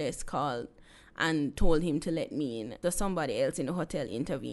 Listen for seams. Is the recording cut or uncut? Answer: cut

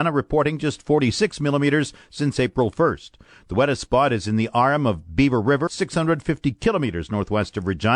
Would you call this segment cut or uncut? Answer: cut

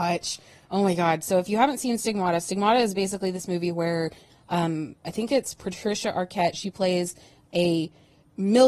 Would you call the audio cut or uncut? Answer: uncut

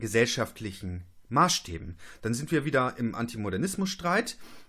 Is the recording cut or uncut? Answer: uncut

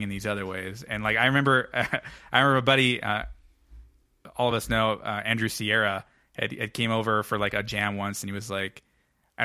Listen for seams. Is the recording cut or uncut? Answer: uncut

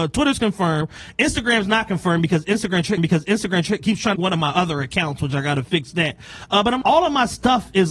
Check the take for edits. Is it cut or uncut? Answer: cut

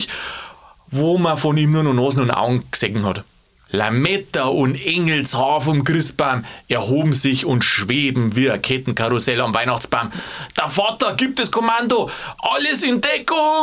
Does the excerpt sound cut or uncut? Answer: uncut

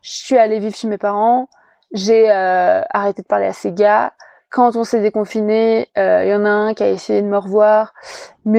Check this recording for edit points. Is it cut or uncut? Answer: uncut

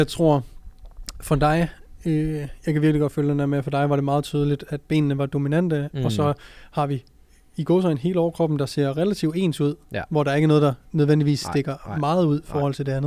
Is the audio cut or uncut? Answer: uncut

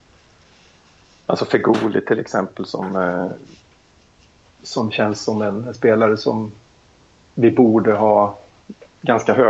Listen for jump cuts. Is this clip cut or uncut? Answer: uncut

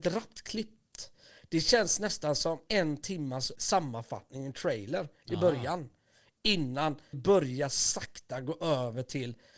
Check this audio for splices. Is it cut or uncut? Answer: cut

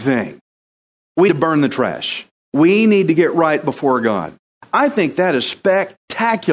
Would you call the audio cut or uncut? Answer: cut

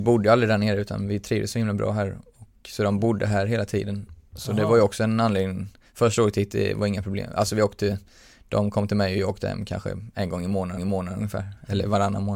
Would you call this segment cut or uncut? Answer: cut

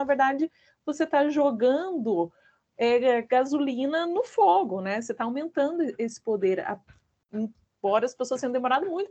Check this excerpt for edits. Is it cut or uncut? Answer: uncut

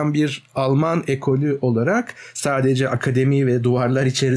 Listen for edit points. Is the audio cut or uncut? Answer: uncut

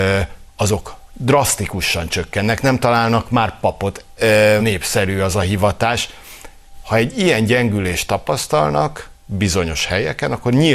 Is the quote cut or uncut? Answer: cut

